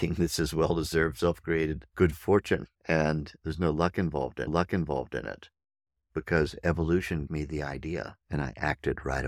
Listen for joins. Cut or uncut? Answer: cut